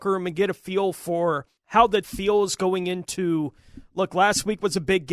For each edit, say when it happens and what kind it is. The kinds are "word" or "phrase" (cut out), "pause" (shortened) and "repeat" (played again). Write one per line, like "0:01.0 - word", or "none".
0:01.6 - pause
0:02.0 - word